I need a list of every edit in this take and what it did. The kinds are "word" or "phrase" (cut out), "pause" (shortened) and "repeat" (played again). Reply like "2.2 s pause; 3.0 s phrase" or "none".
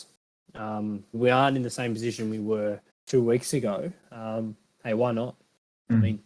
1.1 s word; 2.9 s pause; 4.0 s pause